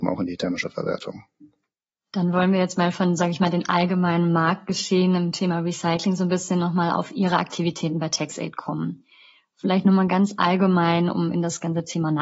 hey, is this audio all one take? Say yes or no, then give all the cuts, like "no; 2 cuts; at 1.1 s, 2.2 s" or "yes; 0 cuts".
yes; 0 cuts